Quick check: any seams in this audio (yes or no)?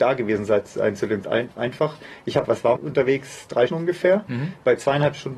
yes